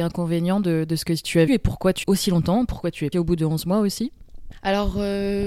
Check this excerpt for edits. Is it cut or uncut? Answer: cut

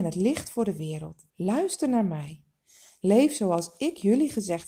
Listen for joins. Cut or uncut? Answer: cut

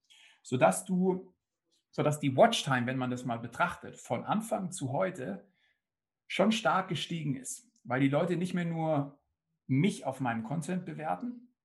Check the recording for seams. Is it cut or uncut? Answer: uncut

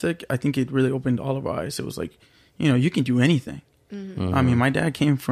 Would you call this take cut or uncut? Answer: uncut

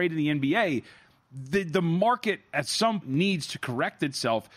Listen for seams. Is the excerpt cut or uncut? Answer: cut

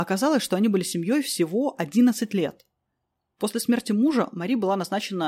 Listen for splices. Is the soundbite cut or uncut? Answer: uncut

